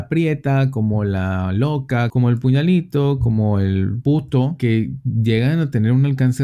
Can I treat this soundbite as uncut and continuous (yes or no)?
yes